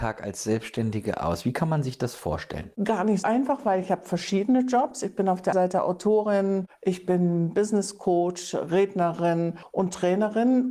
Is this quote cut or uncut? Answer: cut